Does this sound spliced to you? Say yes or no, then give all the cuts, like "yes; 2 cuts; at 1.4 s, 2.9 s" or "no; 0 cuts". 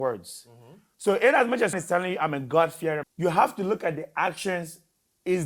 yes; 2 cuts; at 1.7 s, 3.0 s